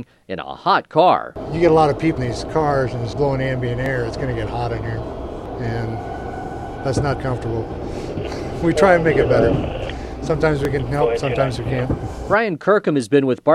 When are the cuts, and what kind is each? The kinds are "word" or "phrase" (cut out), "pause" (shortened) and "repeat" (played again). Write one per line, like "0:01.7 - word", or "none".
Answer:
0:02.2 - word
0:03.1 - word
0:07.2 - word

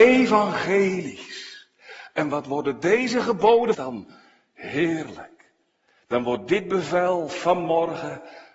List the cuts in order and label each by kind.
0:03.7 - phrase

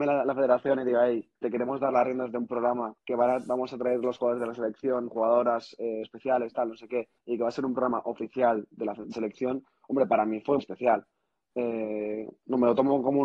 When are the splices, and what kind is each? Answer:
0:01.4 - pause
0:03.0 - pause
0:06.0 - word
0:07.2 - pause
0:09.1 - word
0:10.6 - word

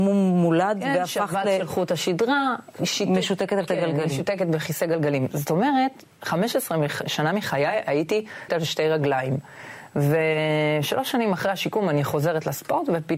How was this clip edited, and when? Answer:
0:03.7 - word
0:07.0 - word
0:08.5 - word

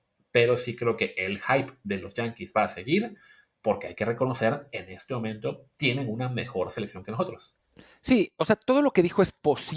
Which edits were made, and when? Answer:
none

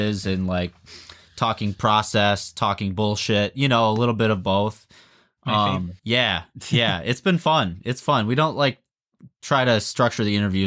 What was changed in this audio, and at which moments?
0:06.0 - pause

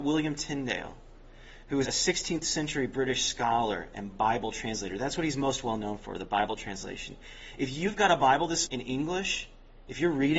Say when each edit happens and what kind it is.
0:01.8 - word
0:08.7 - word

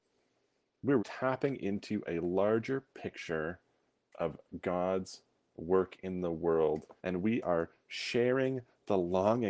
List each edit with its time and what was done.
0:01.0 - word
0:07.0 - pause

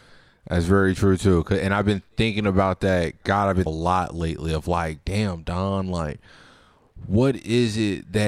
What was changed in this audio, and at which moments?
0:03.7 - phrase

